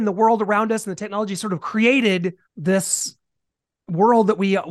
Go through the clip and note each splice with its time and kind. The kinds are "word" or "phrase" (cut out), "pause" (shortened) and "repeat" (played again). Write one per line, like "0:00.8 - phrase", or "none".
0:02.4 - pause